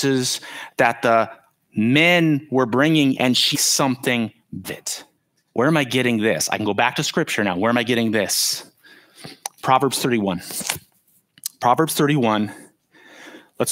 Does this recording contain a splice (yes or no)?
yes